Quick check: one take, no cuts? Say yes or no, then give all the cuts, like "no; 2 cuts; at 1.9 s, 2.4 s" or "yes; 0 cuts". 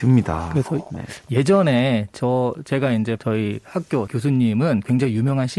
no; 2 cuts; at 3.2 s, 4.1 s